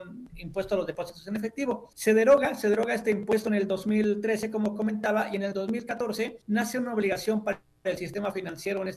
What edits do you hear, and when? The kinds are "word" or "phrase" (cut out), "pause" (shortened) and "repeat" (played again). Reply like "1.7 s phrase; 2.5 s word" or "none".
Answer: 1.9 s pause; 6.4 s pause